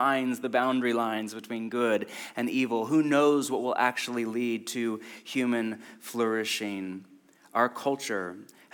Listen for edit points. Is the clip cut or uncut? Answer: uncut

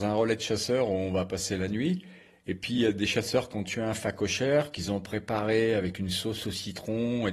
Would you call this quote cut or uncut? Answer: uncut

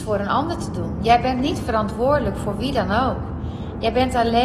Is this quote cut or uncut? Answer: uncut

